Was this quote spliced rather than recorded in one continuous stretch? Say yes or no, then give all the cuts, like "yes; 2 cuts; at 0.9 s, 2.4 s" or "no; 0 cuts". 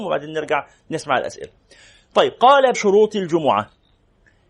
yes; 1 cut; at 2.7 s